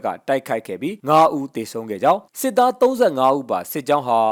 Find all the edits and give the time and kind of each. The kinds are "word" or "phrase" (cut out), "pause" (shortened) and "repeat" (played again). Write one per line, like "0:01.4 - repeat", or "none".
0:01.0 - pause
0:02.3 - pause